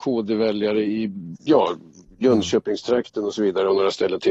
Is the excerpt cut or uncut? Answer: uncut